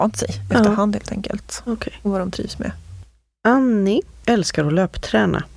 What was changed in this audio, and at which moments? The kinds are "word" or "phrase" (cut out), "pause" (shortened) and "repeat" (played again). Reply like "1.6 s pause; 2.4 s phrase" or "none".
none